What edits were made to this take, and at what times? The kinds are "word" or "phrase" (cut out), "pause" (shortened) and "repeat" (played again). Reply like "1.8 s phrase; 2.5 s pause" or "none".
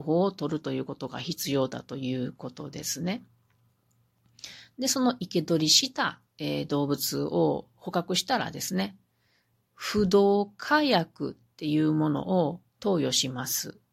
6.3 s pause; 12.7 s pause